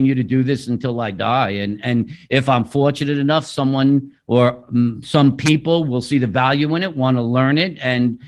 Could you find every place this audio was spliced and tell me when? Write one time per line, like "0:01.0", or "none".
none